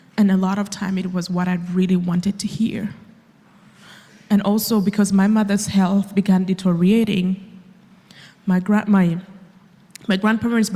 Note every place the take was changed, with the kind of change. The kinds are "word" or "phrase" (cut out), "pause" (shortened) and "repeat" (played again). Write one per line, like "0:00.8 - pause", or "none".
none